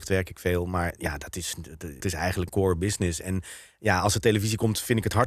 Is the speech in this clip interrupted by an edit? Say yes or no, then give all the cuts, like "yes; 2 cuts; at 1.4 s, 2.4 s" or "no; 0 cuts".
yes; 2 cuts; at 2.0 s, 2.5 s